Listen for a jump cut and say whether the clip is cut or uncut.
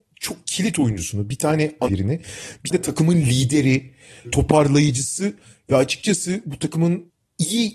cut